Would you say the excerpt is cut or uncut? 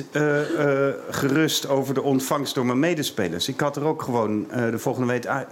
uncut